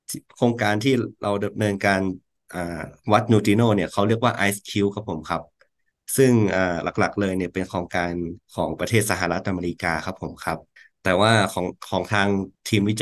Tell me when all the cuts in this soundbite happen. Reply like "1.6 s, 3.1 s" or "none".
8.4 s, 10.8 s

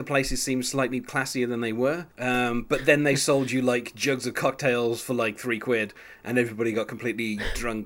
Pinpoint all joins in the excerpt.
2.1 s

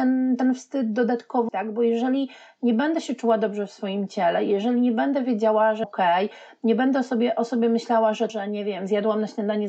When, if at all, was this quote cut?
1.5 s, 5.8 s, 8.3 s

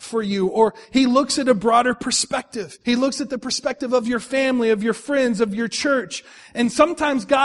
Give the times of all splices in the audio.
2.8 s

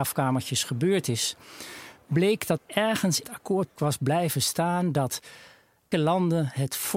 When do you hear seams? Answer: 2.6 s, 3.2 s, 3.8 s, 5.9 s

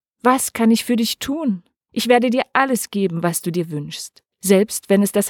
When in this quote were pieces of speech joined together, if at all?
1.8 s, 4.3 s

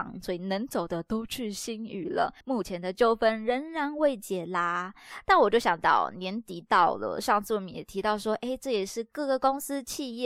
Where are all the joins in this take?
2.4 s

